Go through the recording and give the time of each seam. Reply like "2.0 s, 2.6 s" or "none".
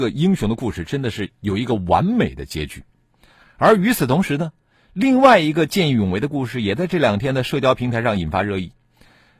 1.3 s